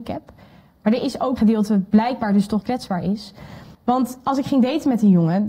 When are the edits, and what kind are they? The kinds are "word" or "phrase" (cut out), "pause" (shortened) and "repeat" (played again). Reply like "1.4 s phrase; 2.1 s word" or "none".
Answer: 1.4 s word; 2.6 s word; 3.7 s pause